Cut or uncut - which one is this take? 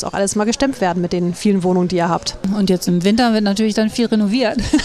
uncut